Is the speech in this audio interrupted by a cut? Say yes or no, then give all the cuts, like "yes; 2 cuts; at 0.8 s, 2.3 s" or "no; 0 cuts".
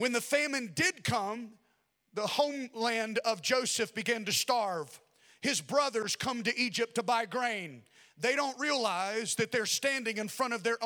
no; 0 cuts